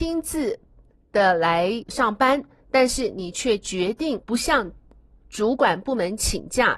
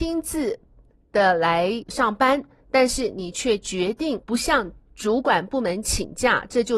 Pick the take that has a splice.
second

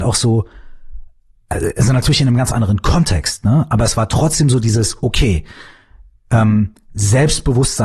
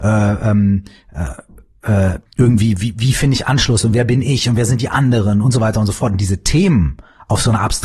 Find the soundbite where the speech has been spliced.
second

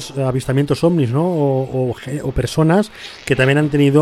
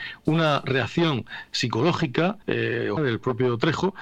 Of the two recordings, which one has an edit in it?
second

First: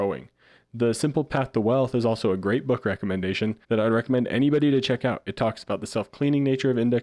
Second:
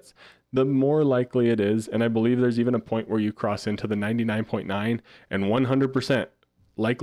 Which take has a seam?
first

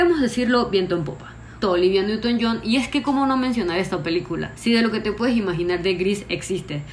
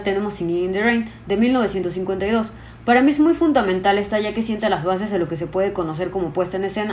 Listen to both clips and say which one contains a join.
first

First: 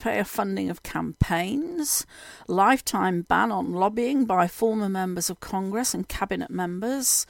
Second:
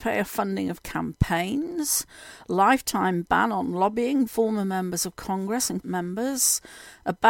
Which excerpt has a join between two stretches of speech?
second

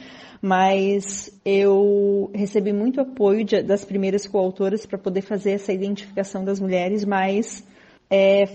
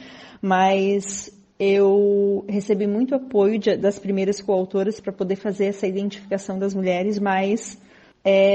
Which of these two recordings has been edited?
first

